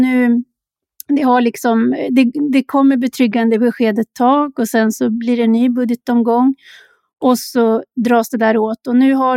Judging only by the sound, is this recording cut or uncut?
uncut